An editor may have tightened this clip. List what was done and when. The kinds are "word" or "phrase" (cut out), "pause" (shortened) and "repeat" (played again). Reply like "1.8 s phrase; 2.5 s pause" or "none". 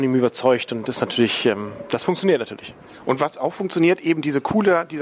none